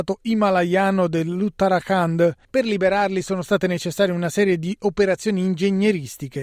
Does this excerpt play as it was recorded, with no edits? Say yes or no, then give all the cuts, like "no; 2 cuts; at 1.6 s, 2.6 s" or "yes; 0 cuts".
no; 1 cut; at 2.4 s